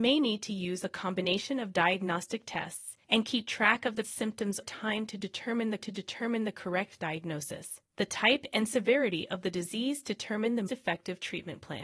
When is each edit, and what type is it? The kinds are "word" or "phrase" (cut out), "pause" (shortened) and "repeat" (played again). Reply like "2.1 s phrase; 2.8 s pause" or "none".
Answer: 3.0 s pause; 4.0 s word; 4.6 s word; 5.8 s repeat; 7.9 s pause; 10.7 s word